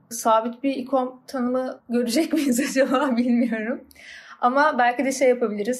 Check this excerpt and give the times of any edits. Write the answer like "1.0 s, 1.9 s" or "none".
1.8 s